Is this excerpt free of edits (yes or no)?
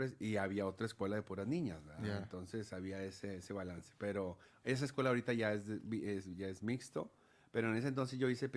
yes